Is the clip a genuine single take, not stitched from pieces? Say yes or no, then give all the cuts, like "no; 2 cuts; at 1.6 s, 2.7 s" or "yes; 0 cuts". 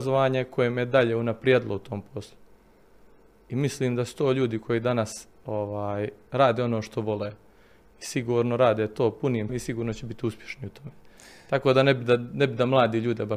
no; 1 cut; at 9.5 s